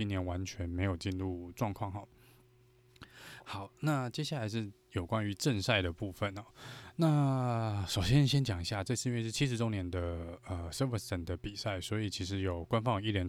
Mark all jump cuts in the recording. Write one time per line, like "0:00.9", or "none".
none